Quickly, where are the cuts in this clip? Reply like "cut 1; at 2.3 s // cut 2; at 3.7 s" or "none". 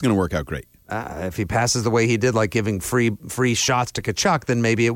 none